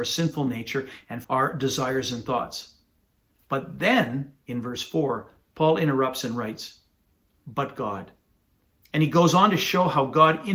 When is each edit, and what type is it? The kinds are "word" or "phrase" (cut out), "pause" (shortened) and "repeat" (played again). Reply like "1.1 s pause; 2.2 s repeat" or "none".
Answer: 1.2 s word